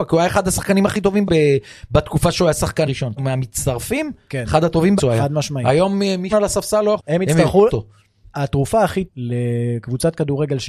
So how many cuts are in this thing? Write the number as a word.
eight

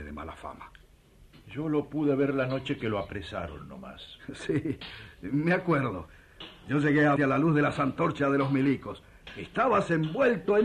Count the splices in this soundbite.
one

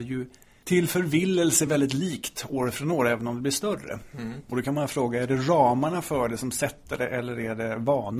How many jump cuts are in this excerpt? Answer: zero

